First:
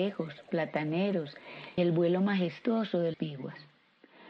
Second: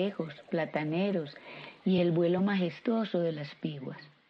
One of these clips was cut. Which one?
first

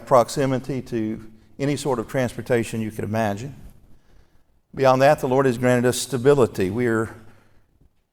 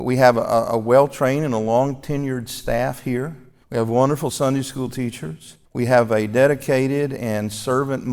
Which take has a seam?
second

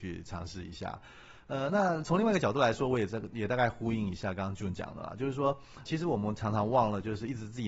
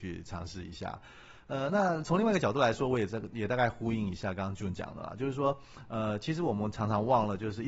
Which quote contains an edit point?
first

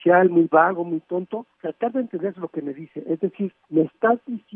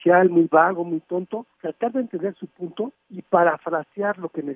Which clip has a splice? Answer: first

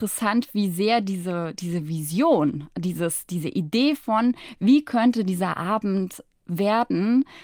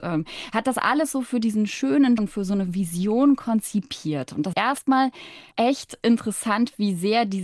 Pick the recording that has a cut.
second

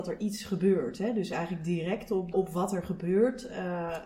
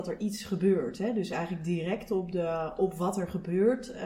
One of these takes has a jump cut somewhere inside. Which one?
first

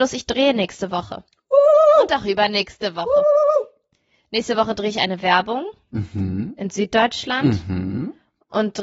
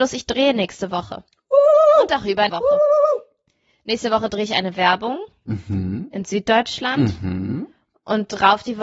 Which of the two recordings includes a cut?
second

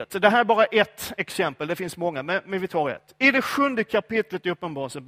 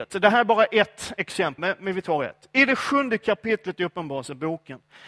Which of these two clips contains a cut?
second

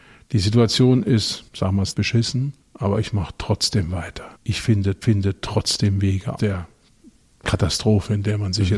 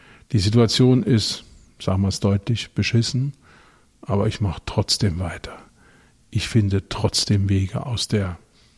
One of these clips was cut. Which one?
first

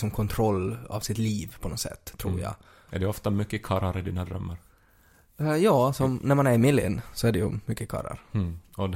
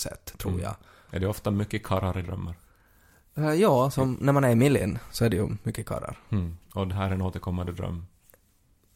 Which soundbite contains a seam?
second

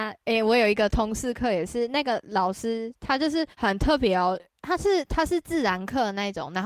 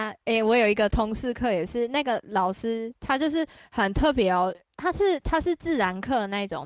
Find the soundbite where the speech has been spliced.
first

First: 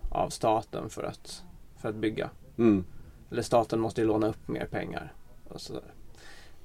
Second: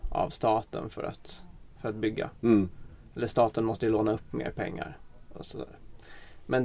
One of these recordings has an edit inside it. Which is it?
second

